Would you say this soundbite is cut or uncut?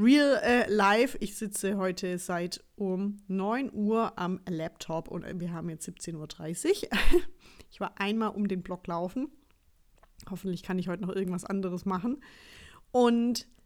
uncut